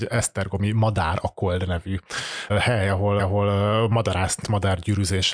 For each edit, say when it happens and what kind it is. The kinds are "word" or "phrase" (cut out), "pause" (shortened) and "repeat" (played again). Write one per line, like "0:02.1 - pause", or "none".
0:02.5 - word
0:03.2 - repeat
0:04.4 - word